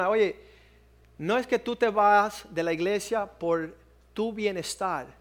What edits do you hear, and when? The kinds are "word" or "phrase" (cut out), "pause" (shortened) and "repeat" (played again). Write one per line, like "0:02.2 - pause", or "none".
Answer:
none